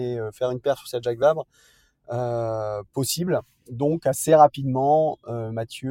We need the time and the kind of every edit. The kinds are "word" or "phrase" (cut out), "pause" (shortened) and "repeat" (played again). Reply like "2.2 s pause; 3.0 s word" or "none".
none